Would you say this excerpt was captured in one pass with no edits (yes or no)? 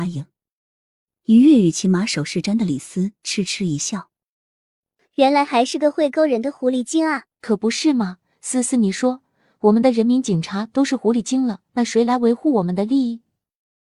no